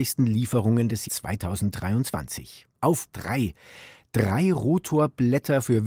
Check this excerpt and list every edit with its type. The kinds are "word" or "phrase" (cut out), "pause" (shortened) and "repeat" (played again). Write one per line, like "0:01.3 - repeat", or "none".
0:01.0 - word
0:03.1 - word